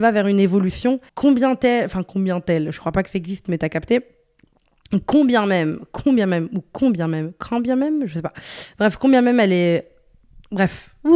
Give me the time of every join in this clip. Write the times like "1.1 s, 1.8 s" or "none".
1.1 s